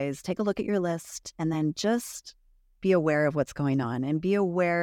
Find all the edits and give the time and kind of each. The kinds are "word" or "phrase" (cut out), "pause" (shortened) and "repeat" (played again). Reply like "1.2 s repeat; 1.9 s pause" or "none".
none